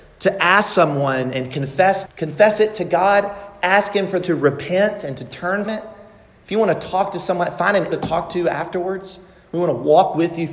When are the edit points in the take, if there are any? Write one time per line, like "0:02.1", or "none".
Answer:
0:02.0
0:04.2
0:05.7
0:07.9